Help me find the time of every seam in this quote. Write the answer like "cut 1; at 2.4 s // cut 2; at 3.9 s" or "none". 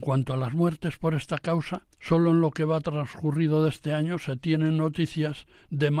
cut 1; at 1.9 s